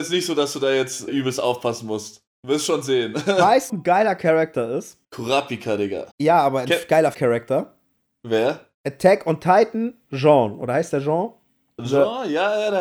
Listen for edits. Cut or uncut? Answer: cut